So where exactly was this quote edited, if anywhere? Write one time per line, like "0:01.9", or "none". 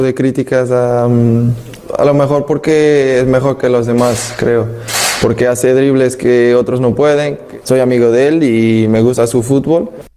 none